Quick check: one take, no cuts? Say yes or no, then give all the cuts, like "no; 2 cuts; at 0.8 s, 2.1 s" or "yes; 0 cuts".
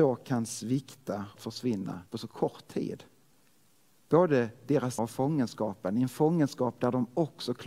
no; 4 cuts; at 1.4 s, 2.1 s, 3.3 s, 5.0 s